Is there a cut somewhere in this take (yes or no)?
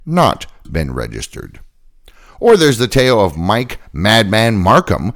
no